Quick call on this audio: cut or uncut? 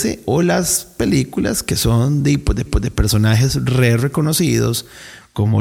cut